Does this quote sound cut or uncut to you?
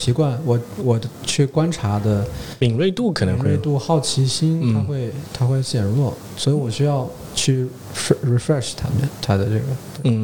uncut